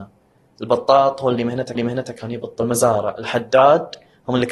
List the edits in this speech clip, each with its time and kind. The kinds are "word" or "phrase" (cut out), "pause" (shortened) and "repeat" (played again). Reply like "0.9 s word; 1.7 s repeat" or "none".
1.7 s repeat